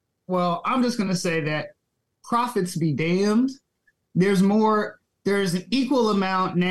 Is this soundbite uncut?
yes; 0 cuts

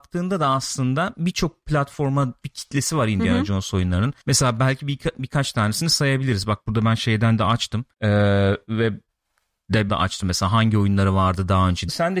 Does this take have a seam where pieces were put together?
yes; 4 cuts; at 2.4 s, 4.2 s, 7.9 s, 9.9 s

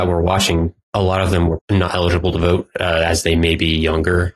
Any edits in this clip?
yes; 1 cut; at 1.6 s

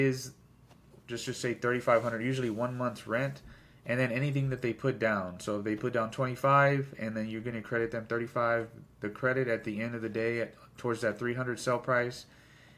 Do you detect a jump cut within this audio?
no; 0 cuts

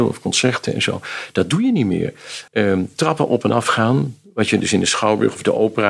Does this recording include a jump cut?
yes; 1 cut; at 2.5 s

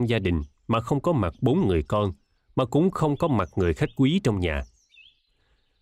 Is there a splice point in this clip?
no; 0 cuts

